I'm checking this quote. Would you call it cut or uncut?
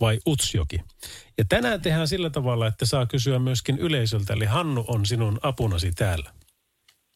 uncut